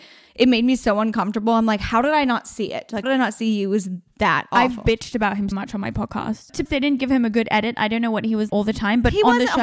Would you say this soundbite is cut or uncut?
cut